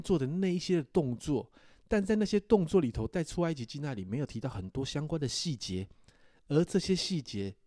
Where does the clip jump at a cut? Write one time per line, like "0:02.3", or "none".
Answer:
none